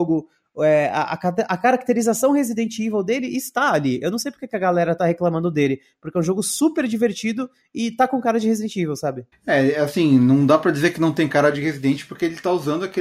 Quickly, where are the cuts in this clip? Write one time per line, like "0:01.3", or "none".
0:09.3